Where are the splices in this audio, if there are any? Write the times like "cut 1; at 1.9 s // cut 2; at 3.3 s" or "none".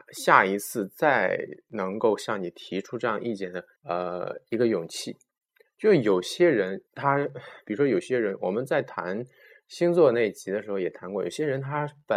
cut 1; at 3.8 s // cut 2; at 6.9 s